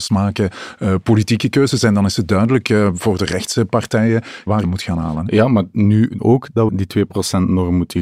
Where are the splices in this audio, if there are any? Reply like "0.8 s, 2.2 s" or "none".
4.6 s, 6.2 s, 6.7 s